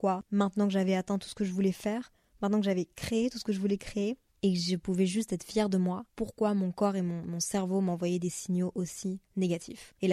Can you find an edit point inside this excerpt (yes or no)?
no